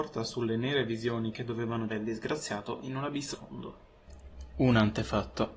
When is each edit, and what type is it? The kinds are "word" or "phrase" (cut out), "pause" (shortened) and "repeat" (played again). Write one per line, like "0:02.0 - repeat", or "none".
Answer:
0:01.9 - word
0:03.3 - word